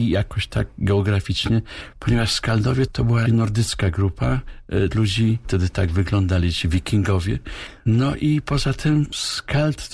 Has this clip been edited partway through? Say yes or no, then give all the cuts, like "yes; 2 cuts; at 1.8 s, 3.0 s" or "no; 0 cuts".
yes; 3 cuts; at 3.3 s, 4.9 s, 5.4 s